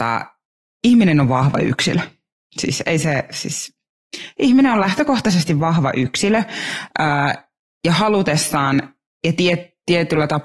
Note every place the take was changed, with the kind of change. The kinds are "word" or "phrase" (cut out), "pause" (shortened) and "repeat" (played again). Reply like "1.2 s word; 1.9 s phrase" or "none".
none